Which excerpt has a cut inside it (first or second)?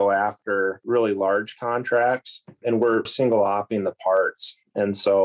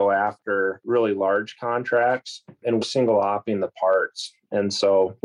second